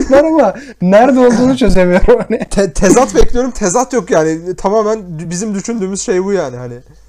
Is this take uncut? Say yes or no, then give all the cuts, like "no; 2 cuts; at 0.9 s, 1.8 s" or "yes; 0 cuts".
yes; 0 cuts